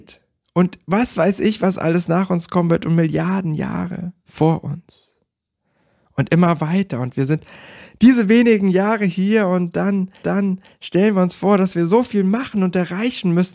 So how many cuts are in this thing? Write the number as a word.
two